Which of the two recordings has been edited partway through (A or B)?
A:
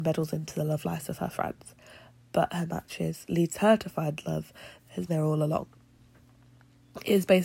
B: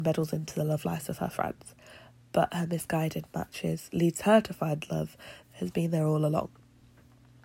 A